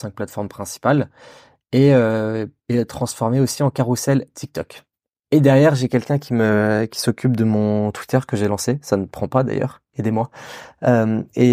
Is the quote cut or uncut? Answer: uncut